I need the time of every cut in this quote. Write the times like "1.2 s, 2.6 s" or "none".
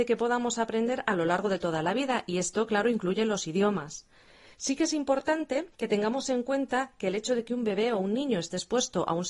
5.7 s